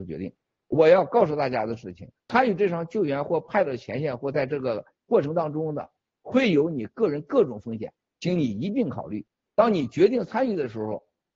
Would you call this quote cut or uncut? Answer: uncut